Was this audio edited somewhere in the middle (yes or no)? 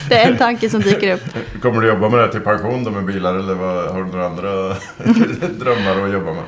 no